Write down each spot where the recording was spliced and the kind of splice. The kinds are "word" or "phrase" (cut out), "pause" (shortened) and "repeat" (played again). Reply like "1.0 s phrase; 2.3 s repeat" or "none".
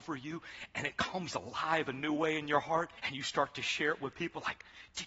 3.0 s pause